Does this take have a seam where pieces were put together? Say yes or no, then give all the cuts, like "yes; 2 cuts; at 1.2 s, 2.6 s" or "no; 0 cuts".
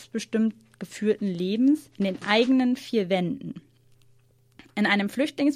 yes; 1 cut; at 1.9 s